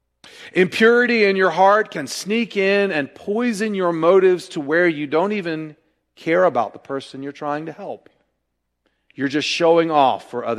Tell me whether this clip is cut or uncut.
uncut